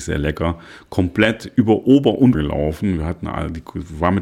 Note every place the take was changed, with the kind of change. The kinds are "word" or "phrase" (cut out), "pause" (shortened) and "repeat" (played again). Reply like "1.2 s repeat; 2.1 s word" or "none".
2.3 s word